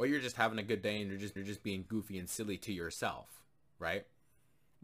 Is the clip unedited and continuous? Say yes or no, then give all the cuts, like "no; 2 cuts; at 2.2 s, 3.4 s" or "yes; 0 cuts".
no; 1 cut; at 1.4 s